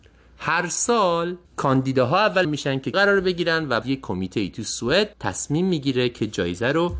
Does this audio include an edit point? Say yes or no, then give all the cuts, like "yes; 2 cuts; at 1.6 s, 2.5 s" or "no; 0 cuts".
yes; 5 cuts; at 1.4 s, 2.4 s, 2.9 s, 3.8 s, 5.1 s